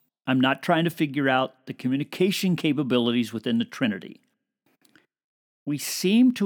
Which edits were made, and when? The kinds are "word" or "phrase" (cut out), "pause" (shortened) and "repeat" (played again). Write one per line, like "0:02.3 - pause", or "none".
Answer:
none